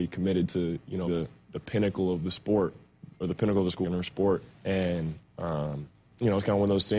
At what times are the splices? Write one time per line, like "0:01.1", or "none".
0:01.1
0:03.8
0:04.5
0:05.9